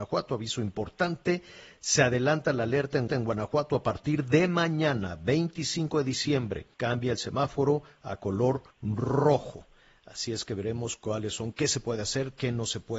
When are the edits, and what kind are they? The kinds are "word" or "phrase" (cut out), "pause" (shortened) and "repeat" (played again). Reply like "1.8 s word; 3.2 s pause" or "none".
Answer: 3.1 s repeat; 6.7 s pause; 8.7 s pause